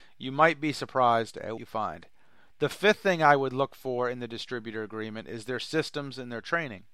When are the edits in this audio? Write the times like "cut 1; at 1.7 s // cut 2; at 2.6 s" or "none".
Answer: cut 1; at 1.6 s